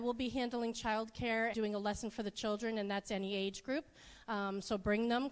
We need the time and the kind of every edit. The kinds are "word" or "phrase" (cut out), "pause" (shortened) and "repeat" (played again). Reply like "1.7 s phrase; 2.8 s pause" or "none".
1.5 s word